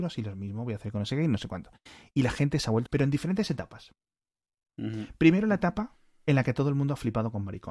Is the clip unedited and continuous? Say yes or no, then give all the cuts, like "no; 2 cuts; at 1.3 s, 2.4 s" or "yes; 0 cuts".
no; 1 cut; at 2.9 s